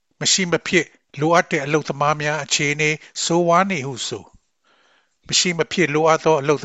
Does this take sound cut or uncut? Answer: uncut